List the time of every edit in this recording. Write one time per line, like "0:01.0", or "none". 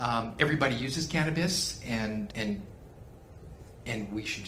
0:02.3

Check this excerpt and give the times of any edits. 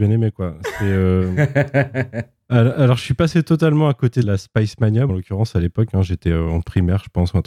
0:04.2
0:05.1

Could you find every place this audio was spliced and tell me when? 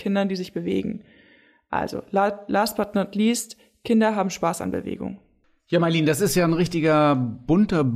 none

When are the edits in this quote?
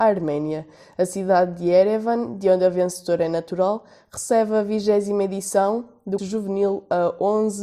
0:06.2

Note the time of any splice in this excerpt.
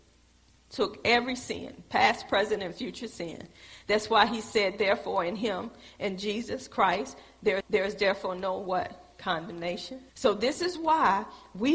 0:07.6
0:10.1

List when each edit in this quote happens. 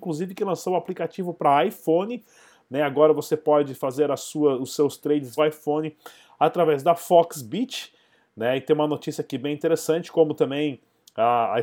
0:05.4

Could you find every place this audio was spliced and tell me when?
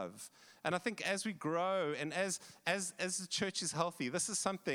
none

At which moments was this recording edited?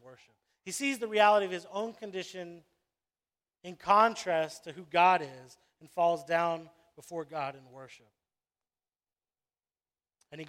none

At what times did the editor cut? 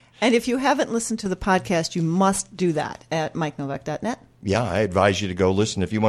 none

